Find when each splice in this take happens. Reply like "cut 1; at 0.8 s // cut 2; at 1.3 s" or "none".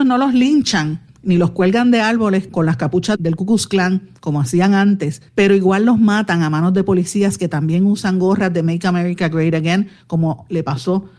cut 1; at 2.5 s // cut 2; at 3.2 s // cut 3; at 5.3 s